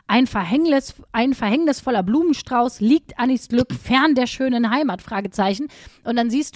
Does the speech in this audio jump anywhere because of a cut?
no; 0 cuts

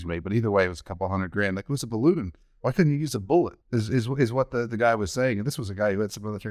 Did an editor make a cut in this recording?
yes; 1 cut; at 3.6 s

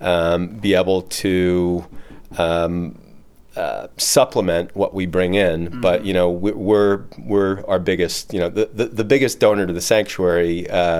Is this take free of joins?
yes; 0 cuts

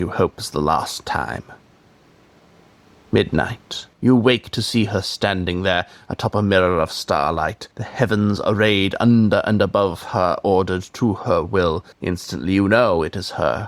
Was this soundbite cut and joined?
yes; 3 cuts; at 3.9 s, 7.7 s, 11.9 s

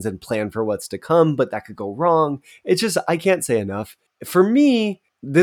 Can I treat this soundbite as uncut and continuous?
yes; 0 cuts

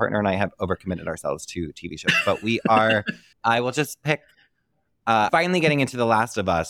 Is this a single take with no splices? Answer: no; 2 cuts; at 3.3 s, 5.3 s

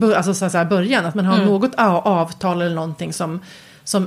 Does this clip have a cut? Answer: no; 0 cuts

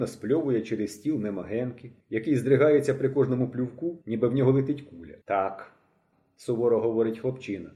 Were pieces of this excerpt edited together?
yes; 3 cuts; at 2.0 s, 4.0 s, 5.2 s

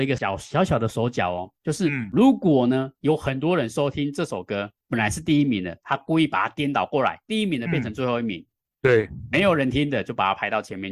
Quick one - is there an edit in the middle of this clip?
no; 0 cuts

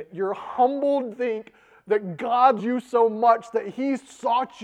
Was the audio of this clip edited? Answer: yes; 2 cuts; at 1.1 s, 2.6 s

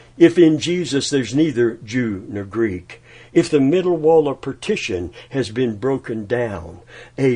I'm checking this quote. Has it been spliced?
no; 0 cuts

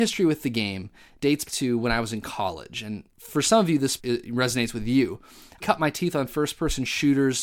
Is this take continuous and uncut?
no; 3 cuts; at 1.5 s, 4.0 s, 5.6 s

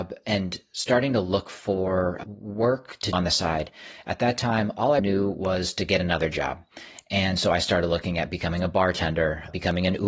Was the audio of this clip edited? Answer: yes; 2 cuts; at 3.1 s, 5.0 s

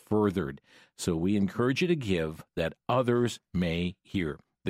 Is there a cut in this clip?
no; 0 cuts

